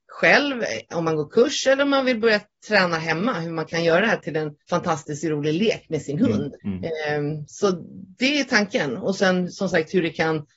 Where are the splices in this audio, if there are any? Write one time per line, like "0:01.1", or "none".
0:04.6
0:06.6